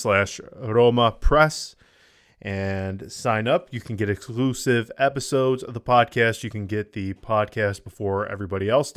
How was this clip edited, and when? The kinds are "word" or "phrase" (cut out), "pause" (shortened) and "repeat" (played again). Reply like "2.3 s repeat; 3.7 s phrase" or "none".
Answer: none